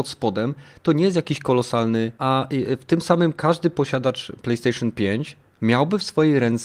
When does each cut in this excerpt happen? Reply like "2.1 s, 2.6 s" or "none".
2.2 s